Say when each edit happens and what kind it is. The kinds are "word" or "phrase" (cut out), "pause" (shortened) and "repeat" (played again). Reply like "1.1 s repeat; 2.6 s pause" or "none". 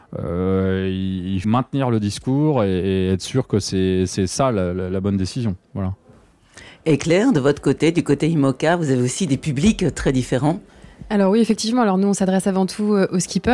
1.4 s word

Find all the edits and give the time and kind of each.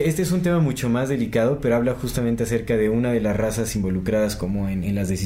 none

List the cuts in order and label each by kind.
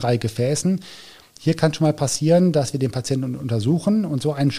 none

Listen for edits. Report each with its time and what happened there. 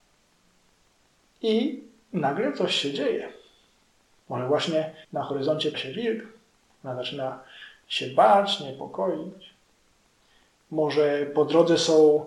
5.0 s pause; 5.7 s word

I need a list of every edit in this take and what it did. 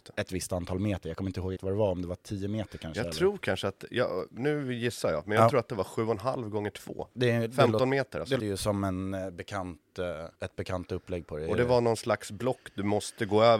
1.6 s word; 7.1 s pause; 8.4 s word; 10.3 s pause

